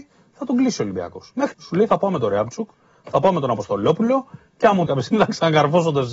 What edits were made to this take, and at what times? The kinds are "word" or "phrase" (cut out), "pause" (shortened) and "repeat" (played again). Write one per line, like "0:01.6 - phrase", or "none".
0:01.5 - word
0:04.9 - word